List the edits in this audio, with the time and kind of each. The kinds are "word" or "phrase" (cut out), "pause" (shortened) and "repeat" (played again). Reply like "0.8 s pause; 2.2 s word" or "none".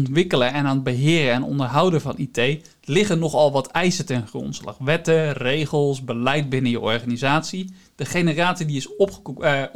none